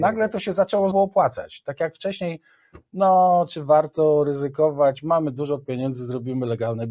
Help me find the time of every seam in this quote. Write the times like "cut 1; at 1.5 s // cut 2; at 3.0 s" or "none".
cut 1; at 0.9 s